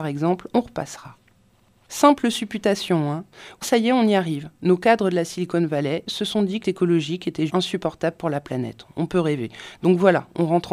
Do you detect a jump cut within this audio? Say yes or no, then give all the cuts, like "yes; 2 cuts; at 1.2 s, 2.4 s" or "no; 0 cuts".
yes; 3 cuts; at 3.6 s, 6.6 s, 7.5 s